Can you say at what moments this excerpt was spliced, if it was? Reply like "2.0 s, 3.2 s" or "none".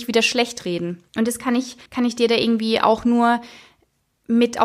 1.1 s, 1.9 s

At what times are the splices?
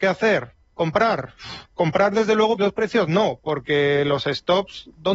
2.6 s

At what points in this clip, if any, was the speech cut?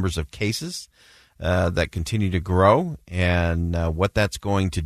none

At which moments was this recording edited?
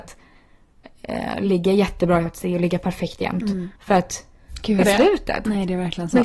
2.3 s, 3.8 s, 4.8 s

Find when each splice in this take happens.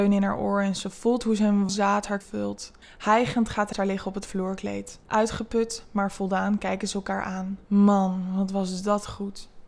1.7 s, 2.2 s, 2.8 s, 3.7 s, 5.0 s, 7.6 s

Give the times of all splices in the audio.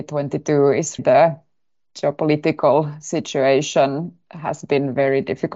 1.0 s

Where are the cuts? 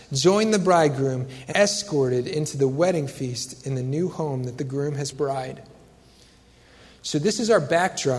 1.5 s, 5.1 s

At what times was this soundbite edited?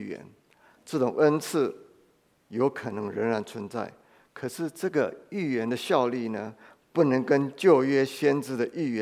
none

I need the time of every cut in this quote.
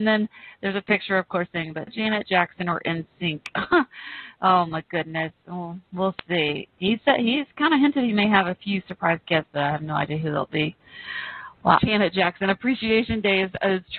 1.9 s, 5.9 s, 11.8 s

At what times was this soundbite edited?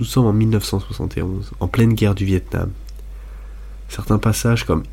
none

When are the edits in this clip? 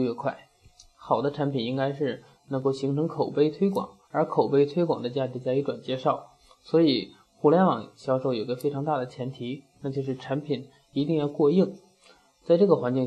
4.0 s

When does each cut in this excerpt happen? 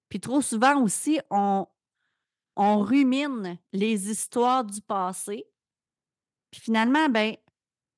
none

